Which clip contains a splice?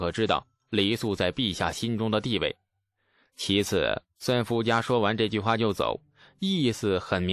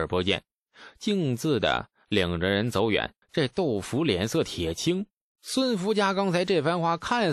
second; 1 cut; at 3.2 s

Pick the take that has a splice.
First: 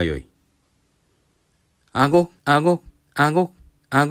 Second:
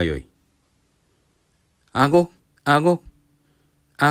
first; 2 cuts; at 2.4 s, 3.0 s

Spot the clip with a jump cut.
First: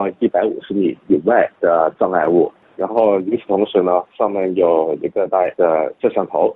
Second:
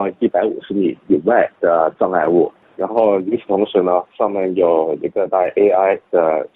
first; 1 cut; at 5.5 s

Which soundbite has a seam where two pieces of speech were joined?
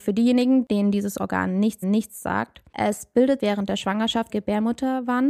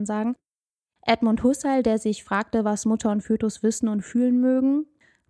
first; 3 cuts; at 1.8 s, 3.4 s, 4.3 s

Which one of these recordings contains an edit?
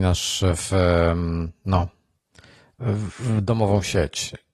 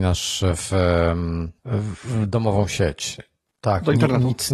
second; 1 cut; at 1.6 s

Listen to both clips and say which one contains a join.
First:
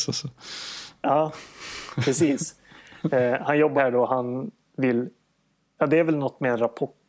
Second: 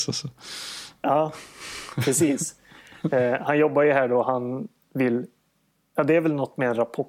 first; 1 cut; at 3.8 s

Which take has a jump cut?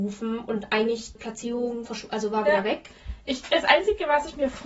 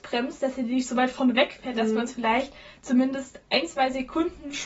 first; 2 cuts; at 1.2 s, 1.9 s

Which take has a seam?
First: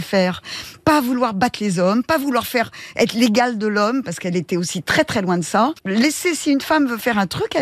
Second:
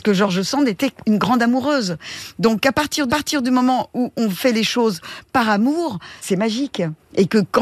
second; 2 cuts; at 3.1 s, 6.2 s

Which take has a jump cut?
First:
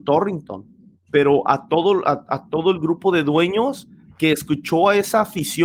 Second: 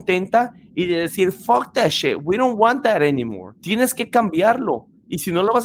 second; 1 cut; at 3.6 s

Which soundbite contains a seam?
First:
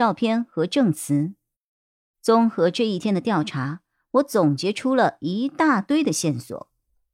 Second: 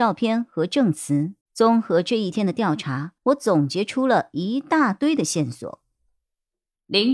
second; 2 cuts; at 1.4 s, 3.2 s

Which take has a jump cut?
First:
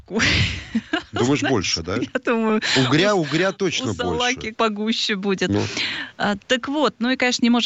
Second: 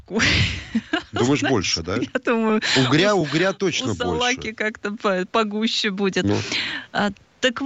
first; 2 cuts; at 4.5 s, 6.4 s

